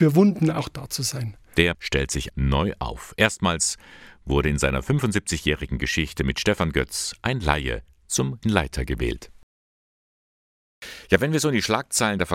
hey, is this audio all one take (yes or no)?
no